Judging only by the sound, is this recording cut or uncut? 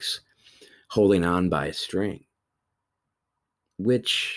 uncut